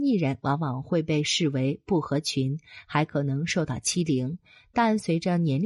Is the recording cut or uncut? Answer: uncut